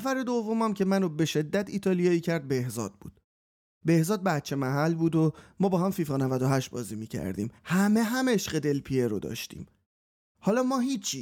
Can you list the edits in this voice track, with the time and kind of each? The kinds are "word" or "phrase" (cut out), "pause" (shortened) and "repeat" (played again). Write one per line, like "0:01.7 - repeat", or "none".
0:07.6 - pause